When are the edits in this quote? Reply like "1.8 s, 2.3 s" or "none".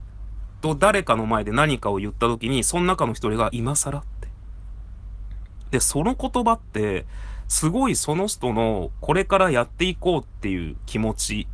3.5 s

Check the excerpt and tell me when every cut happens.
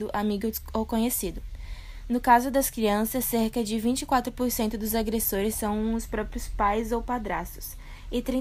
none

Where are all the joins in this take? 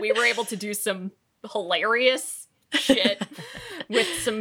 none

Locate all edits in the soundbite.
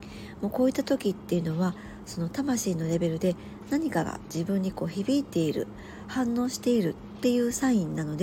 none

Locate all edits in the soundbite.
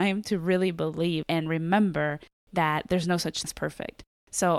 1.2 s, 3.4 s

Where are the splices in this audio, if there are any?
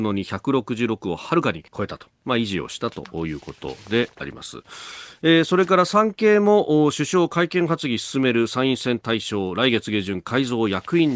1.7 s

